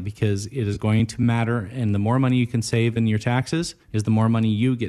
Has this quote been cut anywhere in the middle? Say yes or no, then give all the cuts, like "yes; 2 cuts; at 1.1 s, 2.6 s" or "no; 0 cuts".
yes; 1 cut; at 3.8 s